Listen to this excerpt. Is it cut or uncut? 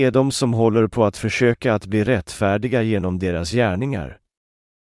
uncut